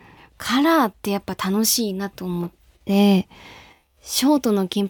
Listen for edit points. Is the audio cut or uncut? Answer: uncut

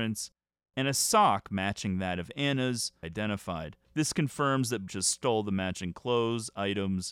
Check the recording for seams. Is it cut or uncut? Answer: cut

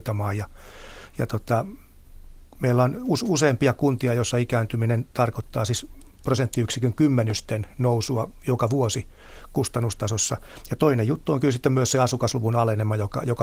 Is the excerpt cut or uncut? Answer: uncut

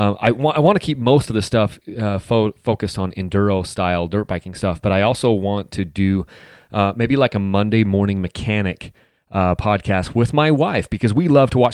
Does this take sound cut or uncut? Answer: uncut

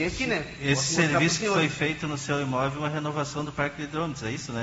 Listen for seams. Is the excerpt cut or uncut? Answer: uncut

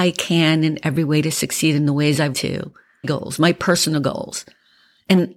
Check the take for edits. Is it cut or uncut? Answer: cut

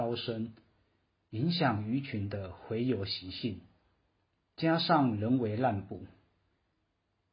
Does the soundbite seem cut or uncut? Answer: uncut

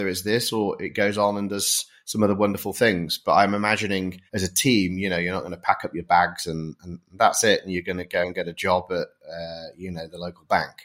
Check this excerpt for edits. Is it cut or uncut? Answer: cut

